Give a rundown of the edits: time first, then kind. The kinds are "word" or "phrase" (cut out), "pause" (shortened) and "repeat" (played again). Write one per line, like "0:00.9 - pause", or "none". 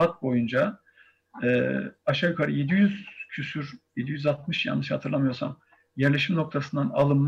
none